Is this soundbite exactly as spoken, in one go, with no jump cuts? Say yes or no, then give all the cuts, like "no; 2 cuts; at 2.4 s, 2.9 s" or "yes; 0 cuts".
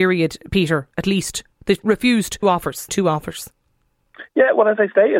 no; 3 cuts; at 0.9 s, 2.4 s, 2.9 s